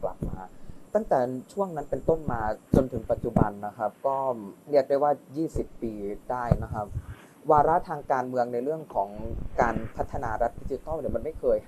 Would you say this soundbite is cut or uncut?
cut